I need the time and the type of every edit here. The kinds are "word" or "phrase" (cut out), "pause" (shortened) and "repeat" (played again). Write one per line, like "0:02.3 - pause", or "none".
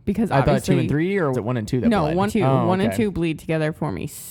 0:01.3 - word
0:02.3 - word